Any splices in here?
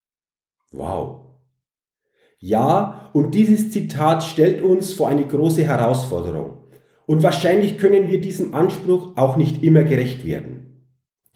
no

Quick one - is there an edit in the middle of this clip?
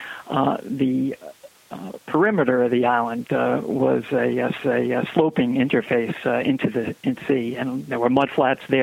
yes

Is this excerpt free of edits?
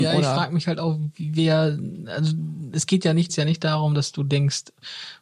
no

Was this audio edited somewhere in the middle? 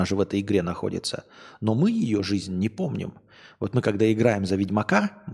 no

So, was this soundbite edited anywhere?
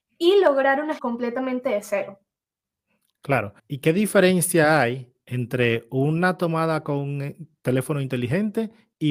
yes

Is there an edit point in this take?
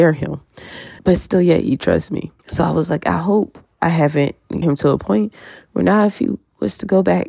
yes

